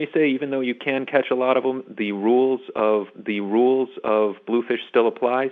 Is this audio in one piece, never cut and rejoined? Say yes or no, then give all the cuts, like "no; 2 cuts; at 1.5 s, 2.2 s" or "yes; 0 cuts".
no; 1 cut; at 3.1 s